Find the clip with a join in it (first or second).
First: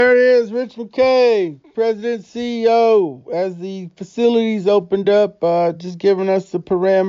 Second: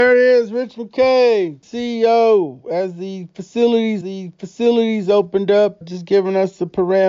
second